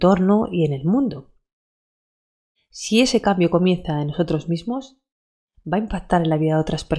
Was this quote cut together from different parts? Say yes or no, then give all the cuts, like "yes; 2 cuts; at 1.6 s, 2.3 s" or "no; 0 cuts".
no; 0 cuts